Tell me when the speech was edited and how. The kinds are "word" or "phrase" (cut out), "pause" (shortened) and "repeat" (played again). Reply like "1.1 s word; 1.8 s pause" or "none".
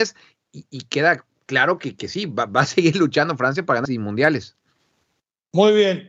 3.8 s word